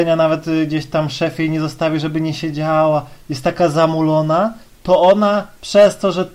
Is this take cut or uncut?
uncut